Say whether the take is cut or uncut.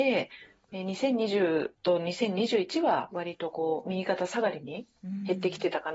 cut